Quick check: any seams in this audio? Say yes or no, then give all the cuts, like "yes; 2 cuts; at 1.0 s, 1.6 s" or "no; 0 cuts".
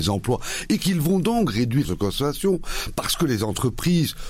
yes; 1 cut; at 1.8 s